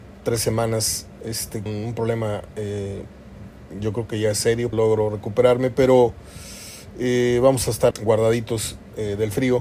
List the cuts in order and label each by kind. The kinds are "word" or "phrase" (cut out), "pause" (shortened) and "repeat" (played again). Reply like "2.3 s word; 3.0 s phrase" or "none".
1.7 s word; 4.7 s phrase; 7.9 s word

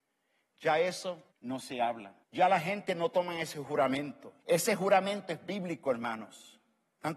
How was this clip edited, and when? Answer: 1.3 s pause; 2.2 s pause; 4.4 s pause

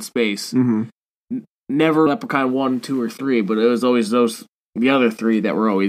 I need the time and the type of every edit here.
2.1 s word

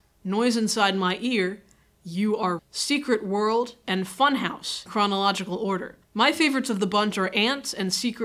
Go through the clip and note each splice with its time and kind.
2.6 s word; 4.9 s word; 6.0 s pause

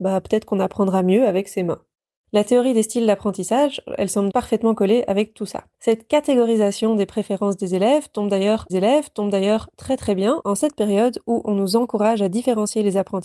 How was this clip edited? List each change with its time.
1.9 s pause; 4.3 s word; 5.7 s pause; 8.7 s repeat

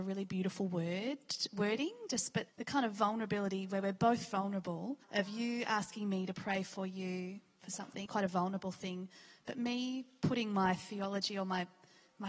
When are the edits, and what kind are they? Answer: 2.5 s word; 5.0 s pause; 8.1 s word

